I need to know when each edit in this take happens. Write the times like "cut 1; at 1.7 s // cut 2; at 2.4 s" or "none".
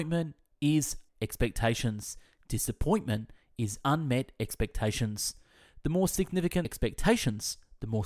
cut 1; at 1.1 s // cut 2; at 6.6 s